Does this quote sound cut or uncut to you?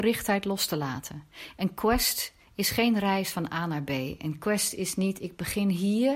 uncut